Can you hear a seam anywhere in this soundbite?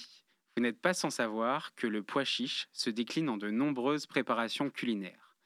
no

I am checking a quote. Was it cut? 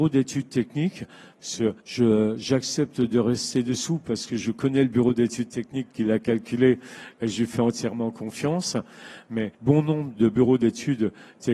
yes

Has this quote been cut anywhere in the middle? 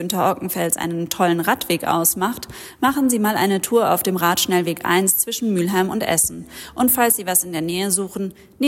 no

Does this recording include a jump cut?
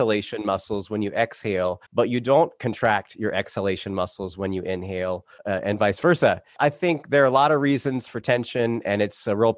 yes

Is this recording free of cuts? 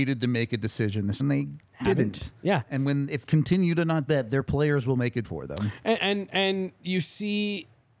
no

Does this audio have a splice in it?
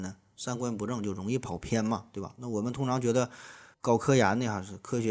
yes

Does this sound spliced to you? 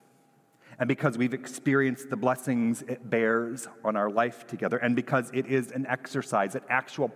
no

